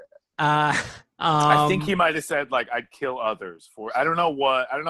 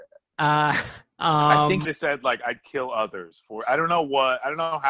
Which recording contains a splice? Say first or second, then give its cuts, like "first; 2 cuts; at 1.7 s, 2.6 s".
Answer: second; 1 cut; at 1.8 s